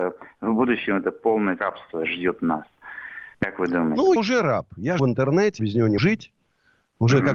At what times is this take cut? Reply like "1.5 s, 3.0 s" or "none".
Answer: 1.6 s, 3.3 s, 4.2 s, 5.0 s, 5.6 s, 6.0 s

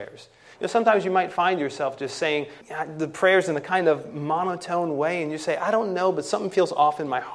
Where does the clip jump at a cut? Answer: 2.6 s

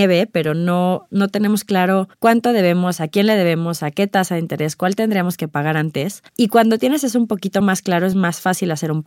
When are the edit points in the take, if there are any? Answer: none

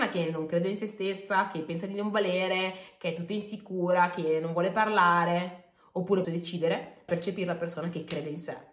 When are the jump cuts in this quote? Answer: 6.2 s, 7.1 s

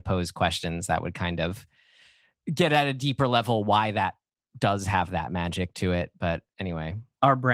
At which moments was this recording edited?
none

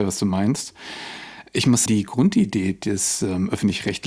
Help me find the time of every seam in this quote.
1.9 s

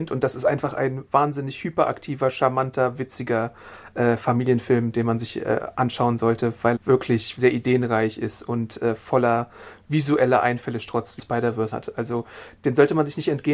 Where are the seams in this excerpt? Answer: 6.8 s, 7.4 s, 11.2 s, 11.7 s

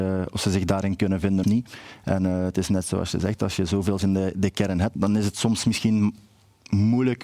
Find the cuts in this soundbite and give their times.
1.4 s, 4.0 s, 5.0 s

